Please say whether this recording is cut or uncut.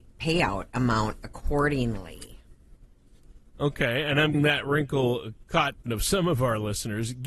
cut